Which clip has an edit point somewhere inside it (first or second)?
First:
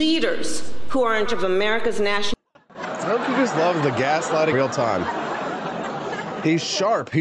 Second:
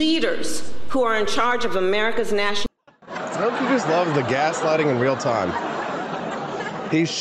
first